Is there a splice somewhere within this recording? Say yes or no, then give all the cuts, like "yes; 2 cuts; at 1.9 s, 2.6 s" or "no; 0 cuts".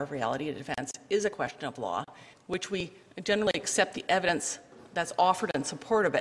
no; 0 cuts